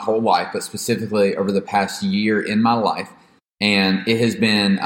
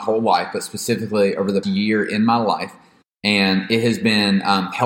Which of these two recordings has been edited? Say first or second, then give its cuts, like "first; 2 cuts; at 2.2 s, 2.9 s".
second; 1 cut; at 1.6 s